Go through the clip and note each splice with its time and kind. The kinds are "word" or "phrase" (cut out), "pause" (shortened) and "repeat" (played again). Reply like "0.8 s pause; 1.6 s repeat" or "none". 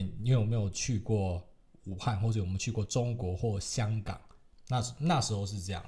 none